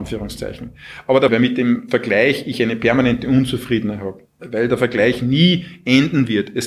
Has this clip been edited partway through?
yes; 1 cut; at 1.3 s

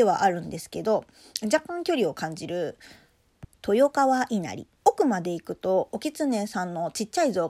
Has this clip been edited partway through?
yes; 2 cuts; at 3.5 s, 4.8 s

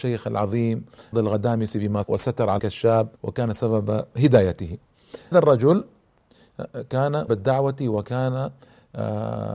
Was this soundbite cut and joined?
yes; 6 cuts; at 1.1 s, 2.0 s, 2.6 s, 3.2 s, 5.3 s, 7.3 s

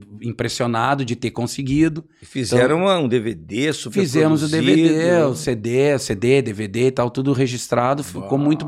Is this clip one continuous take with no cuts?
yes; 0 cuts

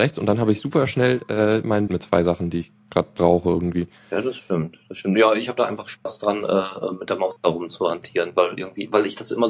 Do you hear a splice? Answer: yes; 1 cut; at 1.9 s

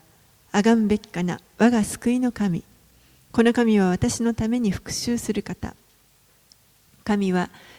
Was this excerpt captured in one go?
yes; 0 cuts

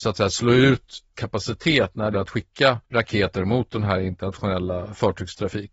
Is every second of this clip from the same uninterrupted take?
no; 3 cuts; at 1.1 s, 2.1 s, 2.8 s

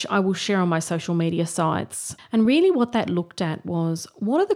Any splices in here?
no; 0 cuts

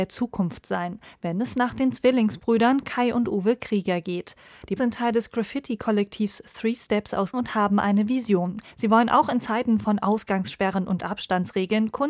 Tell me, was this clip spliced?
yes; 3 cuts; at 4.8 s, 7.3 s, 8.7 s

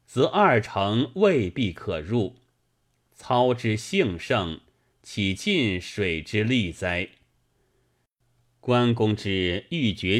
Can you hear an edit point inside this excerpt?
no; 0 cuts

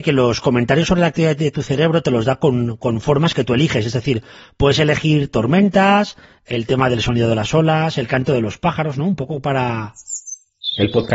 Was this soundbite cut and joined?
no; 0 cuts

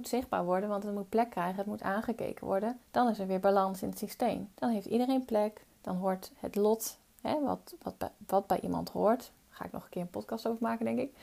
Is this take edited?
yes; 3 cuts; at 2.8 s, 4.5 s, 5.7 s

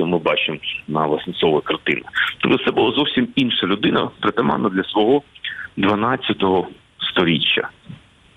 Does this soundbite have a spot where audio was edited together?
no; 0 cuts

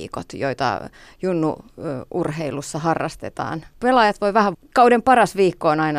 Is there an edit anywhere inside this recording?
yes; 1 cut; at 4.5 s

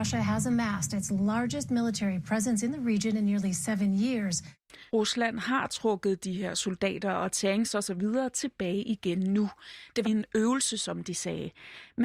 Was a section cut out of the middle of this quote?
yes; 2 cuts; at 4.9 s, 10.0 s

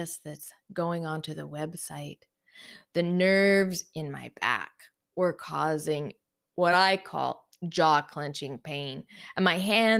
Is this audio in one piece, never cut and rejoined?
yes; 0 cuts

